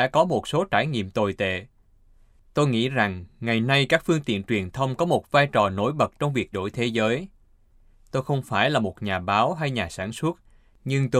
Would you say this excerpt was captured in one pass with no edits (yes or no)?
no